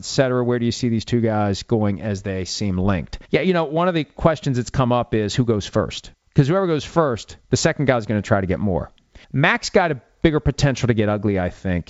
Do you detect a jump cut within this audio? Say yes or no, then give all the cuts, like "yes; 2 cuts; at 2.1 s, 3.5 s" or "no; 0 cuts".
yes; 3 cuts; at 3.3 s, 6.1 s, 9.2 s